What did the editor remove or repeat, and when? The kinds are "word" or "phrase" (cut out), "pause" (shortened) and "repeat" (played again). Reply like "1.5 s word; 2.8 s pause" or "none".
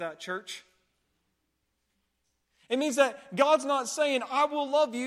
none